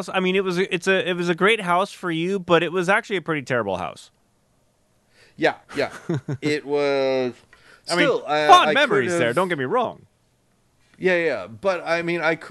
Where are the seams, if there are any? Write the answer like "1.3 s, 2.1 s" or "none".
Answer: 5.6 s

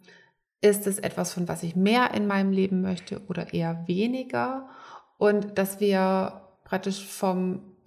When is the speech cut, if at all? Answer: none

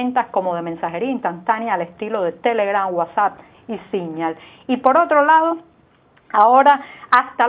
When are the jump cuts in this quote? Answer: none

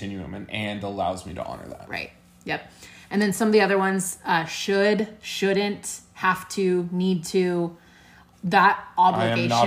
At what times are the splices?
none

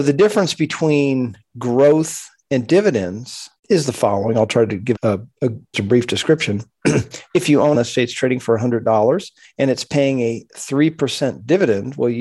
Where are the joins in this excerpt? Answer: 3.6 s, 5.0 s, 5.7 s, 7.7 s, 9.4 s

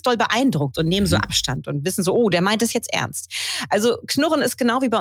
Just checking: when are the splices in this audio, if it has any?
none

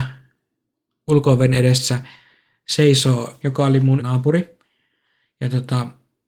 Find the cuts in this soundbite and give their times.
3.4 s, 4.0 s

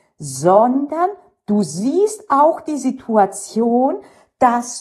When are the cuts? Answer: none

